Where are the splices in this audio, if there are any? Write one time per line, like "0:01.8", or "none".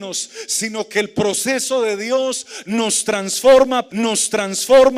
0:03.9